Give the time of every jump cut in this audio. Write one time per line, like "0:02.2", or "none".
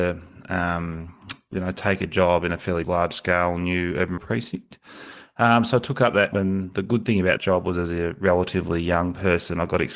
0:02.8
0:04.2
0:06.3
0:07.4